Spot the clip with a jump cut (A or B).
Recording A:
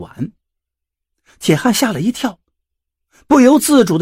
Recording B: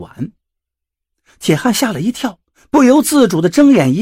B